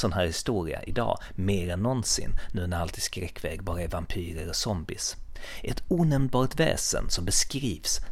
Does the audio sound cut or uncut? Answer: uncut